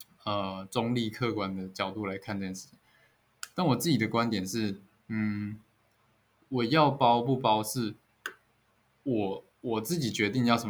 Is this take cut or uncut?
uncut